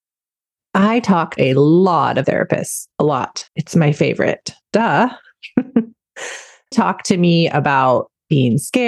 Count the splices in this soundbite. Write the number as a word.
six